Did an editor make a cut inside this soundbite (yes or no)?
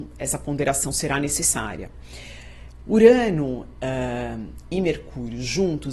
no